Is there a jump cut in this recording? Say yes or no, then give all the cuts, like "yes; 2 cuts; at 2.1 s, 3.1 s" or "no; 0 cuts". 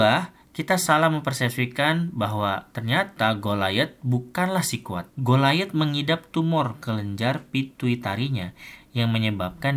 yes; 2 cuts; at 5.1 s, 6.8 s